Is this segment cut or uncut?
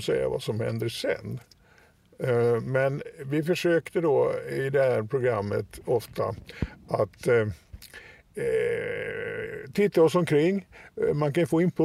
uncut